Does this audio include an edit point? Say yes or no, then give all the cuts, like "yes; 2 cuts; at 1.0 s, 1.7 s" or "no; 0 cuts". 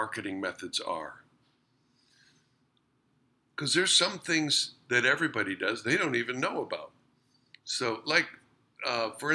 no; 0 cuts